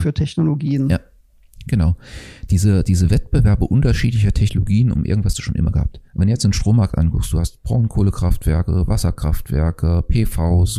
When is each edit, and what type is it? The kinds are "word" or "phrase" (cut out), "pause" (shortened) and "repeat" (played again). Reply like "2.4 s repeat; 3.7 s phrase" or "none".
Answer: 5.3 s phrase; 6.1 s pause